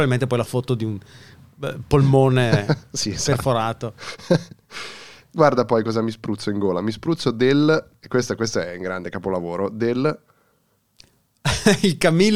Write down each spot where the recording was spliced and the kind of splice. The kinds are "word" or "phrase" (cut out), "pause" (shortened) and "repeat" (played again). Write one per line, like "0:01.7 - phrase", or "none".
none

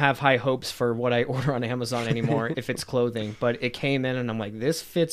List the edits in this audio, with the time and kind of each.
none

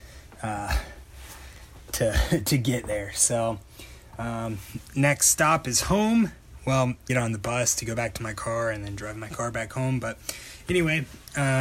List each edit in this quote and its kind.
0:07.1 - phrase

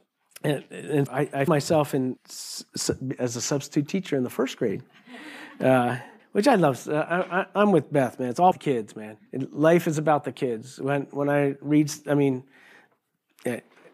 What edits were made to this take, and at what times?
0:01.1 - word
0:01.5 - word
0:02.2 - word
0:06.2 - pause
0:08.5 - word
0:09.3 - pause

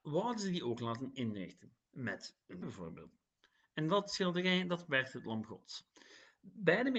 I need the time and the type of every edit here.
0:02.6 - word

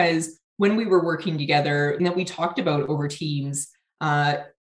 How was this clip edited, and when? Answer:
0:02.0 - phrase

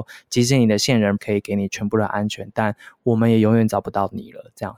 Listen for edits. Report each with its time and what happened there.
0:01.2 - word

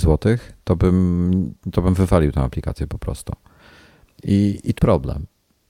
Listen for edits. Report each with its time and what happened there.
0:04.8 - word

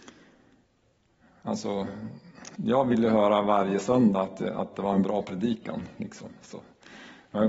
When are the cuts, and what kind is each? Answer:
0:02.5 - pause

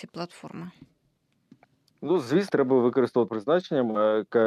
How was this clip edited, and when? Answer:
0:02.5 - word
0:03.3 - word

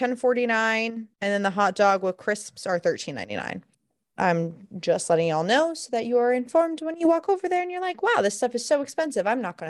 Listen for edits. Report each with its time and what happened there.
0:01.1 - pause
0:03.7 - pause

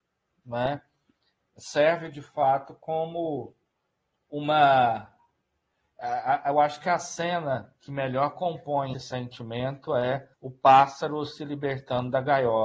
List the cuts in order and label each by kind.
0:08.9 - word
0:10.3 - pause

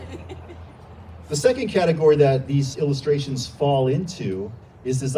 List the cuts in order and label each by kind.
0:02.7 - word

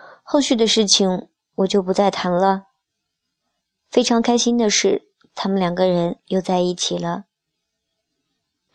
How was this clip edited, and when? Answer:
none

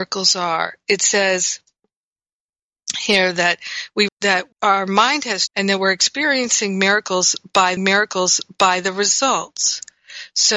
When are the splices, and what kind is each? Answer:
0:04.1 - word
0:04.5 - pause
0:05.5 - word
0:07.8 - repeat

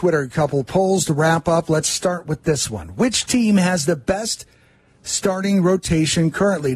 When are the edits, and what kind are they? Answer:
none

